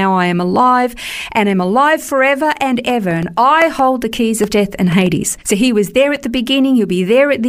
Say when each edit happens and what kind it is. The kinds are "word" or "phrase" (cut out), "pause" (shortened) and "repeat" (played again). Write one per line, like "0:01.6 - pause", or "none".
0:05.4 - pause